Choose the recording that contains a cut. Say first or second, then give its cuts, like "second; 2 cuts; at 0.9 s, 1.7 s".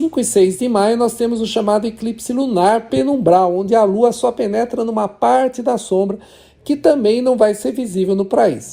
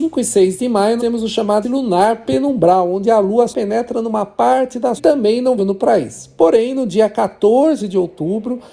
second; 5 cuts; at 1.0 s, 1.6 s, 3.5 s, 5.0 s, 5.6 s